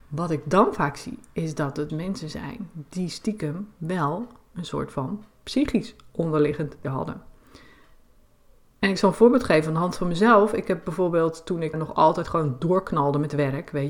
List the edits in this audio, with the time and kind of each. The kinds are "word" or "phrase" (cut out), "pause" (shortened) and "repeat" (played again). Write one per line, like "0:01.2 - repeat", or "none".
0:01.9 - word
0:06.8 - word
0:11.7 - word